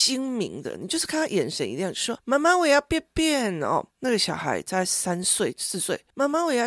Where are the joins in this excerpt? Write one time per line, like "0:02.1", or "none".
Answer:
0:03.9

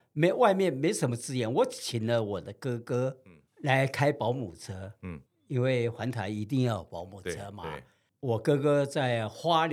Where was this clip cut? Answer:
0:03.5
0:05.3

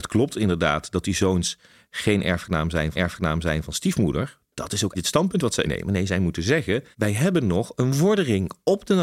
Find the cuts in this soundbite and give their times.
0:02.9
0:04.9
0:05.6
0:06.9

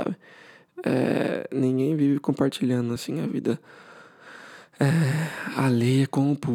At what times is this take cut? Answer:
none

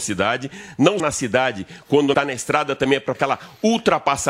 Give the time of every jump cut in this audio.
0:01.0
0:02.1
0:03.1

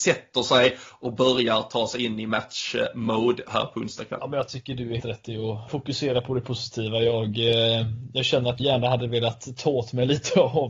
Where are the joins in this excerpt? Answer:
0:05.0
0:05.7
0:08.6

